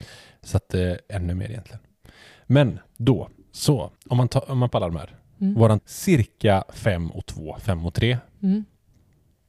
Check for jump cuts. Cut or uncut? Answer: cut